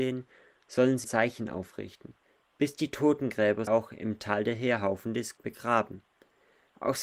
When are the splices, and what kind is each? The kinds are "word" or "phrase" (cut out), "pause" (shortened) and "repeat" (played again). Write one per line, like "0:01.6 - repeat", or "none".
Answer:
0:01.0 - word
0:03.7 - word
0:05.4 - word